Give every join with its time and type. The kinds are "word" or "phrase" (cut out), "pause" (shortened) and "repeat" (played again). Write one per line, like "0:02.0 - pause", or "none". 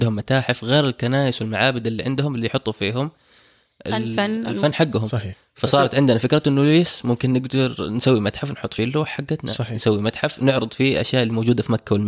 none